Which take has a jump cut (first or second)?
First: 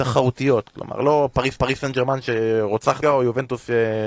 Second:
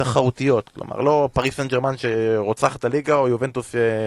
first